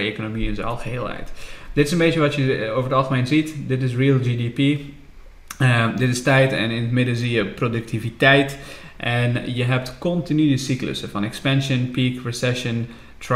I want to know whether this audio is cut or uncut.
uncut